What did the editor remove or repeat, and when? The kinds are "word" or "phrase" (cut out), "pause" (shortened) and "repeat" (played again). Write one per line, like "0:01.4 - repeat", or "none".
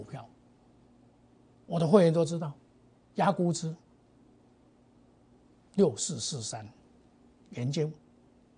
none